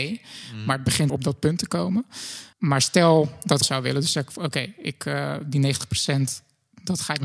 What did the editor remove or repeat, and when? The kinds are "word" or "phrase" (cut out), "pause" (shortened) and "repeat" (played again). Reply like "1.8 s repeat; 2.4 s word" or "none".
1.1 s phrase; 2.5 s pause; 3.6 s phrase